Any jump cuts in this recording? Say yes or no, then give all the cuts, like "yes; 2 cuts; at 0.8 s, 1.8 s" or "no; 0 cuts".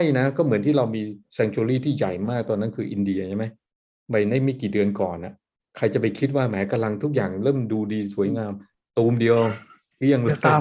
no; 0 cuts